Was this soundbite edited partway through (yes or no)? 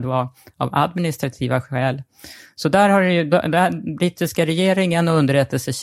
no